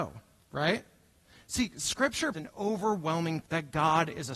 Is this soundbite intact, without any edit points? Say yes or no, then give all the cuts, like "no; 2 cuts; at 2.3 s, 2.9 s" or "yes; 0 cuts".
no; 2 cuts; at 2.3 s, 3.4 s